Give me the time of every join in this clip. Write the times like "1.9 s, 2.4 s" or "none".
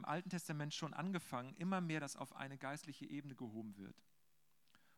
none